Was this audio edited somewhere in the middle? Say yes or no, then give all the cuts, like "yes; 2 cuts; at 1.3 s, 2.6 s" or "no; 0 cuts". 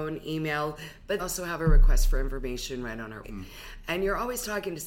yes; 2 cuts; at 1.2 s, 3.2 s